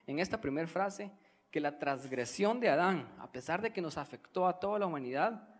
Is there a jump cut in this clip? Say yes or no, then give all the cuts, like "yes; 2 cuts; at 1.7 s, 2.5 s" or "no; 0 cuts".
no; 0 cuts